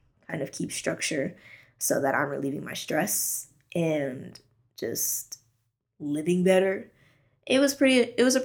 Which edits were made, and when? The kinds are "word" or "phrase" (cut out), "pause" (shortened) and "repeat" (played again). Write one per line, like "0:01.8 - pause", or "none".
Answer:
none